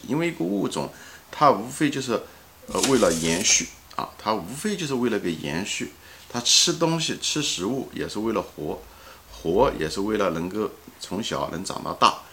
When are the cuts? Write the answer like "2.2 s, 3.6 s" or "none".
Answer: none